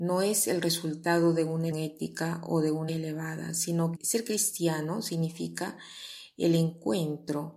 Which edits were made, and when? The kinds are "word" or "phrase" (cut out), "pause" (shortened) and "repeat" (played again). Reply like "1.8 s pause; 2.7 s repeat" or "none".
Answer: 1.7 s word; 2.9 s word; 3.9 s word